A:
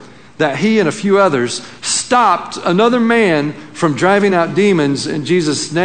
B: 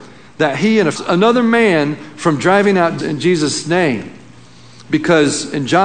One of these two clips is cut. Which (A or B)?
B